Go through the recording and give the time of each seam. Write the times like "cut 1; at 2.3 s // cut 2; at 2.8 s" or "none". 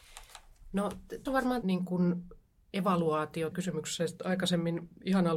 cut 1; at 1.3 s // cut 2; at 1.6 s // cut 3; at 3.5 s

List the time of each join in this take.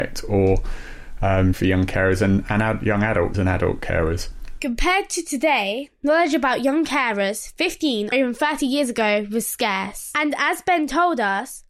cut 1; at 1.5 s // cut 2; at 3.3 s // cut 3; at 8.1 s

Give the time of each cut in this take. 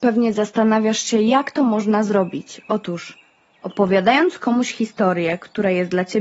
none

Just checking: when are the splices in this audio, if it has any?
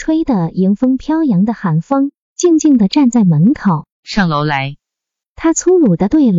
cut 1; at 3.9 s

